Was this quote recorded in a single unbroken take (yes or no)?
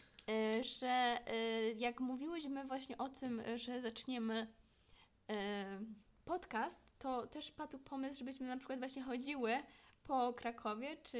yes